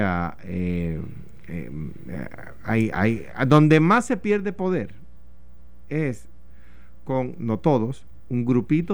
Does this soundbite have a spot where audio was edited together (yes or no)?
no